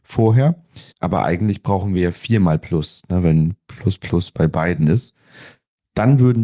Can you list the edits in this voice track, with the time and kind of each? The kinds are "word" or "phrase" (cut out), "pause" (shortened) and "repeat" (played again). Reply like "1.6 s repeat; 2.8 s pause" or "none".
0.9 s pause